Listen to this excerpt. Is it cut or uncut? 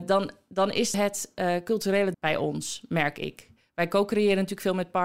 cut